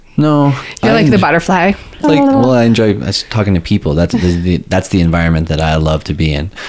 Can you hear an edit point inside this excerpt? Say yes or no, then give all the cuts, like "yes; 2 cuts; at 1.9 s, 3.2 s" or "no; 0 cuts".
yes; 2 cuts; at 2.0 s, 4.1 s